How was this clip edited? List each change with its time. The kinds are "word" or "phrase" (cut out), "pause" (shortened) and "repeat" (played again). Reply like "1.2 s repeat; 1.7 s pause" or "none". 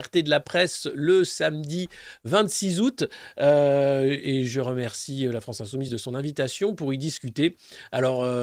none